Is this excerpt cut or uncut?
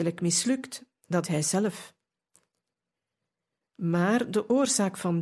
cut